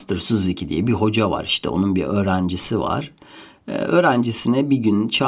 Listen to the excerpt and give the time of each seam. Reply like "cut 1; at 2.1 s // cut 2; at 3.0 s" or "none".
none